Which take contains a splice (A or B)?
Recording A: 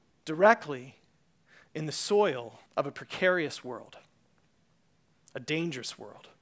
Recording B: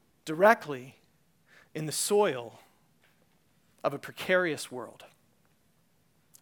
A